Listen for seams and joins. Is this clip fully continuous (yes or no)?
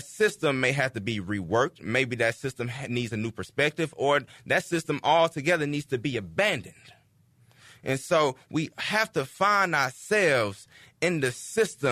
yes